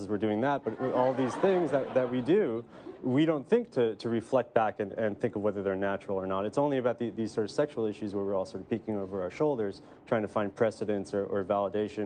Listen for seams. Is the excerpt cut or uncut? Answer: uncut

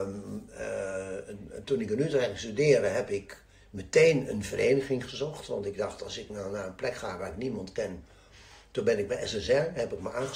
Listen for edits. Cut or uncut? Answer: uncut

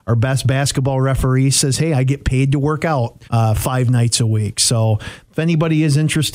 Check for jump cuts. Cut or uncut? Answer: cut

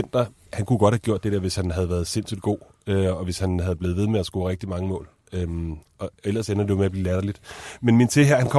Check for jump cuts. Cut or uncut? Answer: uncut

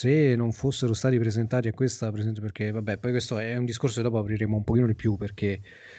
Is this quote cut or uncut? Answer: uncut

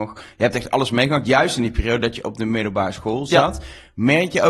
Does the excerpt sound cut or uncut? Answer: uncut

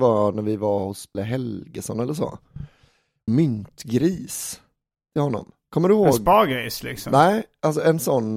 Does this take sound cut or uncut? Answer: cut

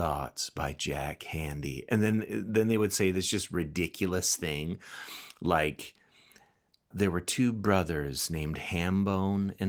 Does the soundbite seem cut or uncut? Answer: cut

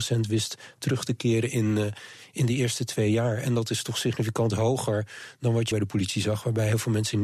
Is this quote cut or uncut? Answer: cut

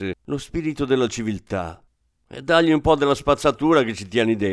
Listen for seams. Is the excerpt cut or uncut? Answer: uncut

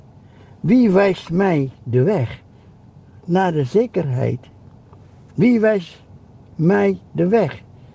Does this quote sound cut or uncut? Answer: uncut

